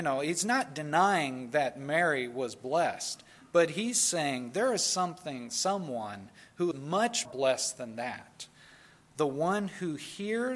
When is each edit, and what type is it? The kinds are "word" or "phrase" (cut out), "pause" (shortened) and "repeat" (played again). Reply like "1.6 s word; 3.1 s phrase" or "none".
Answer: 6.7 s word; 7.3 s word